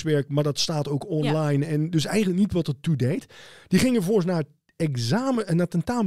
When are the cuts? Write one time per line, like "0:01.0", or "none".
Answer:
none